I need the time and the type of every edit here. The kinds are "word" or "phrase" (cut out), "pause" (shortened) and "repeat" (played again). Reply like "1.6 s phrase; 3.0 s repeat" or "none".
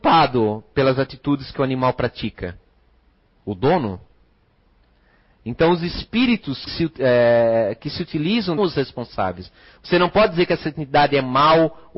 6.7 s word; 8.6 s phrase